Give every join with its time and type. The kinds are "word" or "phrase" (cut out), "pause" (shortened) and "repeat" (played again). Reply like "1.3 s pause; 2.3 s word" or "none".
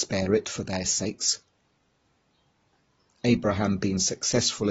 none